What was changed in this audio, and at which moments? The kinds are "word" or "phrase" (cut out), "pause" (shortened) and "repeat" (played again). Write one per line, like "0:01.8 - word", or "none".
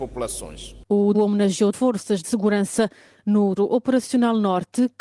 0:01.1 - word
0:01.7 - phrase
0:02.2 - phrase
0:03.6 - word